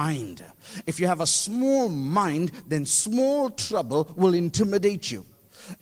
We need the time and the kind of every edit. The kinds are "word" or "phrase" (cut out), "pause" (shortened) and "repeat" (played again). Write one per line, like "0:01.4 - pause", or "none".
none